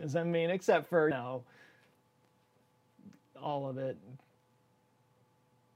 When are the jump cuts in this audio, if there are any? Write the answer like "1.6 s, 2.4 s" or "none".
1.1 s